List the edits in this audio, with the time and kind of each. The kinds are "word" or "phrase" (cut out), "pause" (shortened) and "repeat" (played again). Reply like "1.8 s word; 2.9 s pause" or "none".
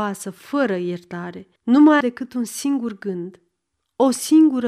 1.6 s pause; 2.0 s word